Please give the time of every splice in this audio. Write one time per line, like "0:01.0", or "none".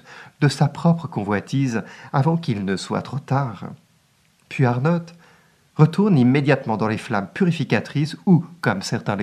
none